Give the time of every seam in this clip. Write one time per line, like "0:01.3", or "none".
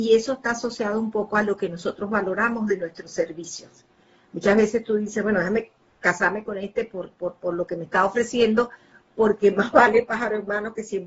none

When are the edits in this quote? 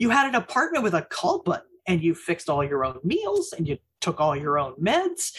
none

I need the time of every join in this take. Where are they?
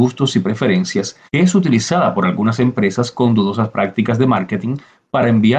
0:01.3

